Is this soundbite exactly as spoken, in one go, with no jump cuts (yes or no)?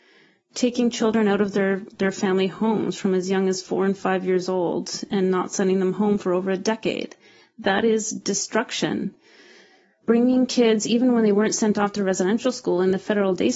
yes